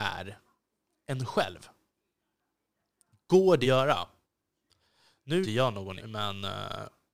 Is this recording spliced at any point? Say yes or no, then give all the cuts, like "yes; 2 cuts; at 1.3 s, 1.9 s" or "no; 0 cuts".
yes; 3 cuts; at 3.6 s, 5.4 s, 6.0 s